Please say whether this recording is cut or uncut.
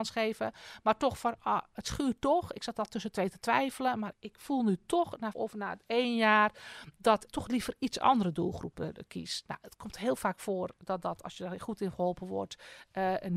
cut